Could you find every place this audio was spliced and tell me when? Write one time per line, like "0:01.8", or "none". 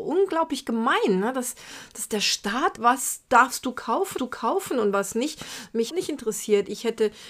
0:02.8
0:04.2
0:05.9